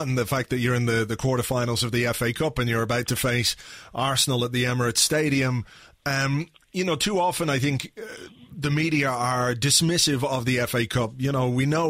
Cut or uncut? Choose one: uncut